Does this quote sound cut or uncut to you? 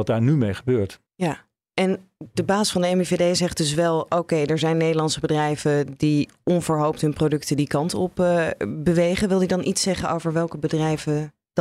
cut